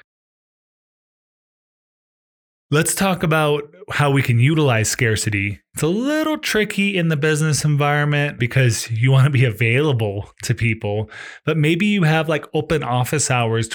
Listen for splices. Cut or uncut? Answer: cut